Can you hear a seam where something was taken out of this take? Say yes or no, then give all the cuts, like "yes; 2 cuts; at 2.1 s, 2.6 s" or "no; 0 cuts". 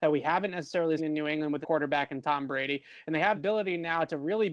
yes; 3 cuts; at 1.0 s, 1.6 s, 3.3 s